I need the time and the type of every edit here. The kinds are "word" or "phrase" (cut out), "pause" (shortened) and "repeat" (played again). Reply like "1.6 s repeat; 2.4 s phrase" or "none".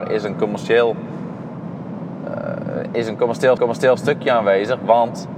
3.6 s repeat